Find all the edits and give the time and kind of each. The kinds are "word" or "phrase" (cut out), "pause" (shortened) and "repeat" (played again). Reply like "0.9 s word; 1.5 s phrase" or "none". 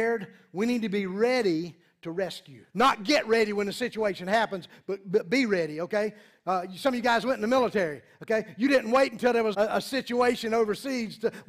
2.7 s pause; 9.5 s word